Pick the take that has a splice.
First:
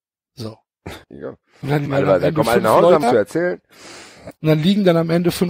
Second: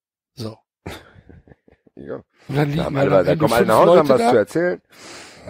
first; 4 cuts; at 1.0 s, 1.9 s, 3.0 s, 4.4 s

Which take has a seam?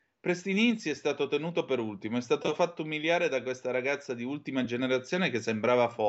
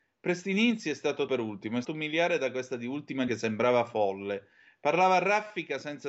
second; 4 cuts; at 1.3 s, 1.8 s, 2.7 s, 3.3 s

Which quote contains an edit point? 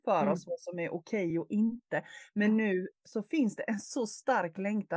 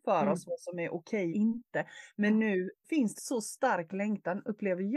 second; 3 cuts; at 1.3 s, 2.8 s, 3.2 s

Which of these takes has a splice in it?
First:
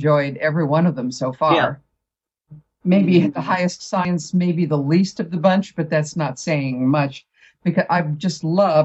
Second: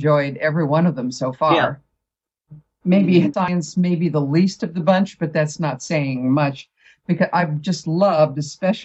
second; 1 cut; at 3.3 s

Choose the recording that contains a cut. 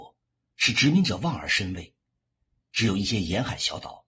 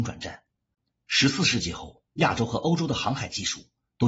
second; 1 cut; at 2.1 s

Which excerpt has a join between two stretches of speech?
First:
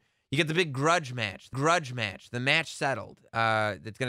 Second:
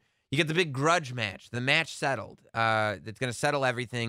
first; 1 cut; at 1.5 s

